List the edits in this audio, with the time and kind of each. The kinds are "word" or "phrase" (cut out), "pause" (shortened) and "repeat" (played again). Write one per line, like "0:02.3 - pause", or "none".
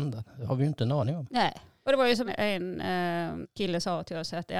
0:02.3 - word
0:03.4 - word